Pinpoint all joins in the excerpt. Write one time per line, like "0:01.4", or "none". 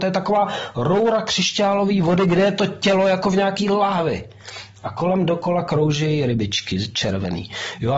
none